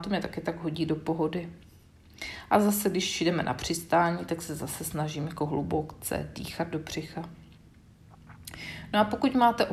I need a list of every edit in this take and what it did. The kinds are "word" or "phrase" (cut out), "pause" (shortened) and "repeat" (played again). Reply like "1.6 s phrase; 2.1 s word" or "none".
none